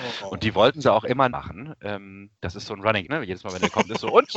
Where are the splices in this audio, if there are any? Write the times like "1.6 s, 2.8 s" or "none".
1.3 s, 3.0 s